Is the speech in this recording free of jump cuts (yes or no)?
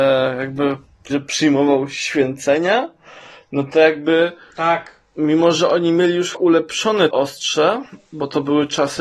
no